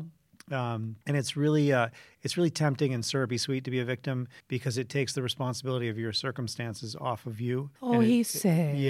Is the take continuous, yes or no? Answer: no